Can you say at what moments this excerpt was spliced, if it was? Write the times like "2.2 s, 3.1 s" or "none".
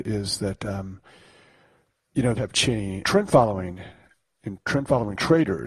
2.4 s, 3.0 s